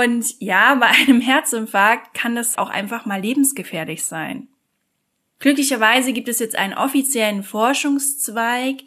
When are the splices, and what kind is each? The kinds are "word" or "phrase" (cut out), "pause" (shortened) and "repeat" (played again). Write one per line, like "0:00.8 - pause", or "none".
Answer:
0:02.6 - word